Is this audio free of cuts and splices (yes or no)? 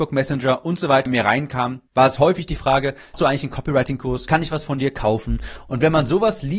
no